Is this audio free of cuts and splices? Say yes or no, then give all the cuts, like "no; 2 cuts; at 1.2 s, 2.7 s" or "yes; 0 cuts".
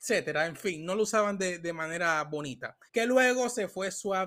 no; 1 cut; at 2.9 s